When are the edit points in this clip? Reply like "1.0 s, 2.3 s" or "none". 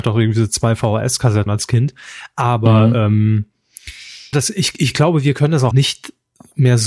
1.5 s, 4.3 s, 5.7 s